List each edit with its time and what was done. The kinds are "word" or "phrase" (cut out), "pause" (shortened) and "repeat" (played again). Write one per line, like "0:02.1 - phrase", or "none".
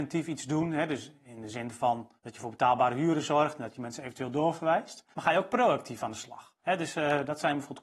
0:02.2 - pause
0:05.1 - pause
0:06.6 - pause